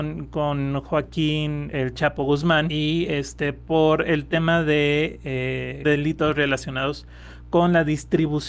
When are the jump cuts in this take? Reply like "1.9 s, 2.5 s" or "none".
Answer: 1.7 s